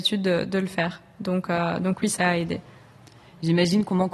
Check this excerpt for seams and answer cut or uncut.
uncut